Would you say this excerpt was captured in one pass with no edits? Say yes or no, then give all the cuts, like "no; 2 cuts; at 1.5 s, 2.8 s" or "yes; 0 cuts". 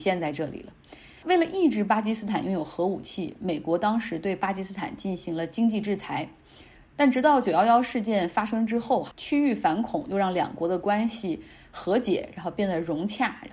no; 1 cut; at 9.1 s